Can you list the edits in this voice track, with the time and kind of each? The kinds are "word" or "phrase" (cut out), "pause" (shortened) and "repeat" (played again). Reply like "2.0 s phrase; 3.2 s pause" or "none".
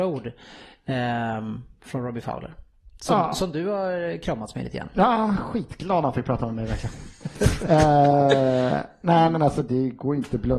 none